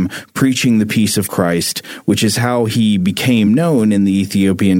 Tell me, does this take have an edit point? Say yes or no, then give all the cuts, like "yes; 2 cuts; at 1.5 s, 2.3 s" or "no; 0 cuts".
no; 0 cuts